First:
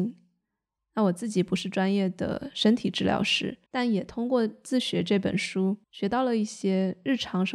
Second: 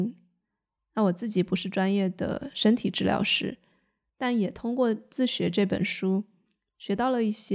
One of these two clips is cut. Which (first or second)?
first